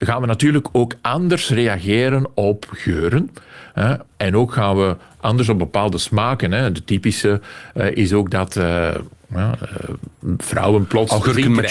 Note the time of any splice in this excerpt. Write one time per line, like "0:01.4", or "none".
0:04.1